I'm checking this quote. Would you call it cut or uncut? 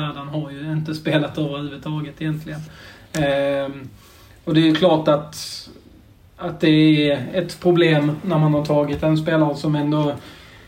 uncut